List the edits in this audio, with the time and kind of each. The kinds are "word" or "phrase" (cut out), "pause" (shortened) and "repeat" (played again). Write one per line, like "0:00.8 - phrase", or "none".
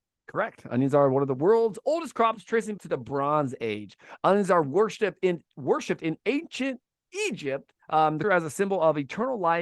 0:02.8 - word
0:07.8 - pause
0:08.2 - word